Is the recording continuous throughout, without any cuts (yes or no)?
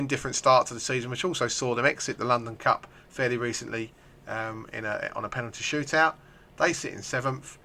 yes